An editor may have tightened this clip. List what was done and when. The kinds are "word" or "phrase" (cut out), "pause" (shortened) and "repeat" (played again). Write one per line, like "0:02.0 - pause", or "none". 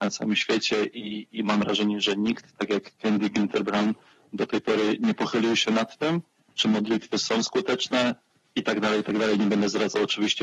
none